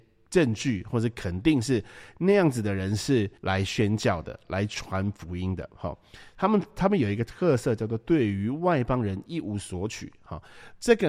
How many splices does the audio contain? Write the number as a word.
one